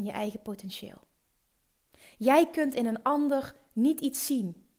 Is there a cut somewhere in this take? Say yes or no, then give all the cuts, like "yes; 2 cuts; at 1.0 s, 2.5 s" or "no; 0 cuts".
no; 0 cuts